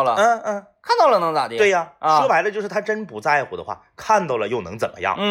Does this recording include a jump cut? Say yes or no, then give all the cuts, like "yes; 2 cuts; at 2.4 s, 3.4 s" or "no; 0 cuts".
no; 0 cuts